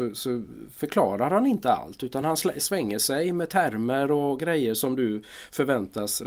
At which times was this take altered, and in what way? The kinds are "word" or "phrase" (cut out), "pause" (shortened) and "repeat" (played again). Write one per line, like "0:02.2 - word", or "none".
none